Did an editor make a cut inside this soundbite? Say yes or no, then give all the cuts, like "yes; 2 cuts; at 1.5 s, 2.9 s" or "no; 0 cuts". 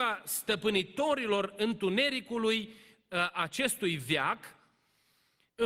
no; 0 cuts